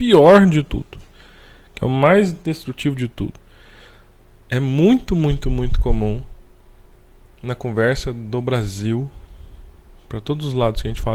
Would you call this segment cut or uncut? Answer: uncut